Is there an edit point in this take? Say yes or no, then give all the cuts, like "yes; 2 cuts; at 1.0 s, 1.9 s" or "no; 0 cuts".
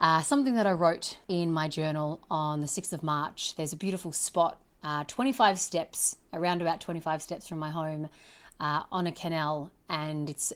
yes; 1 cut; at 1.2 s